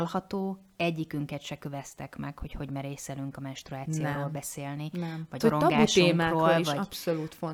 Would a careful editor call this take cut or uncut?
cut